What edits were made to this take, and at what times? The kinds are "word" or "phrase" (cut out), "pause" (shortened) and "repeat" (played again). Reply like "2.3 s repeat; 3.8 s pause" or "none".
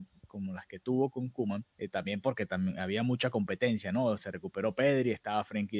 1.7 s pause